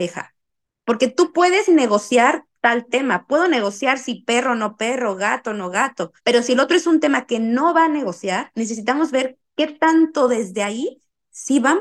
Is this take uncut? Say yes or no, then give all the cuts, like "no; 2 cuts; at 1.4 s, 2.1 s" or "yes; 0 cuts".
no; 1 cut; at 6.2 s